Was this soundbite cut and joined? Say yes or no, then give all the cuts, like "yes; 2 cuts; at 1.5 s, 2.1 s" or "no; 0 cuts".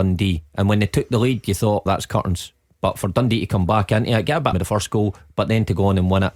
yes; 2 cuts; at 1.9 s, 4.5 s